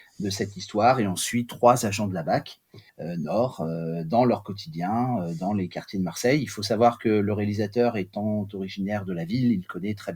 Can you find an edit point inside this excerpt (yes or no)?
yes